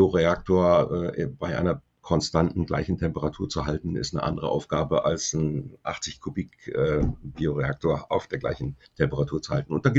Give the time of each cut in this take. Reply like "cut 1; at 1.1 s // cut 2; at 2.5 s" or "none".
cut 1; at 8.8 s